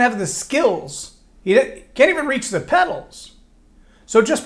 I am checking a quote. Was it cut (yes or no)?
no